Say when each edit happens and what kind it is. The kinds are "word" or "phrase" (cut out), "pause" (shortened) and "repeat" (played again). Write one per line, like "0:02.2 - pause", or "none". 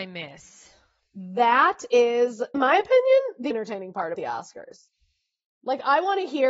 0:02.5 - word
0:03.5 - word
0:04.1 - word